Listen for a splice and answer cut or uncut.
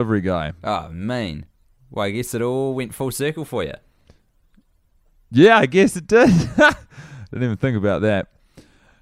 uncut